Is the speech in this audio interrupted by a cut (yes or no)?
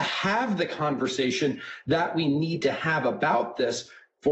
no